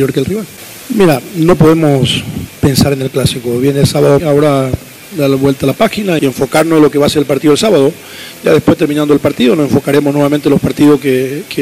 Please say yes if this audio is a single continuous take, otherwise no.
no